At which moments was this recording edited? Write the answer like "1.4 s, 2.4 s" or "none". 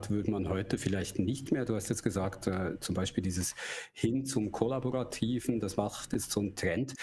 5.8 s